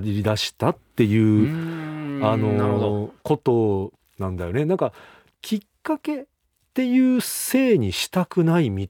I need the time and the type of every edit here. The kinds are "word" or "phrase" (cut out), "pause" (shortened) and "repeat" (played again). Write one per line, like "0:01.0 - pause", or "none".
0:03.2 - pause